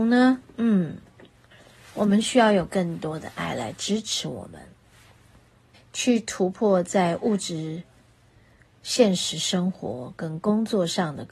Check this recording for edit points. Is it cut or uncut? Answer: uncut